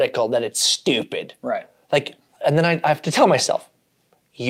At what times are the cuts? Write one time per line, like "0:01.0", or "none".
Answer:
none